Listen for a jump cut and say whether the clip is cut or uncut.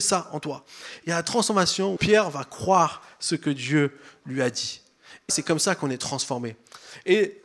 cut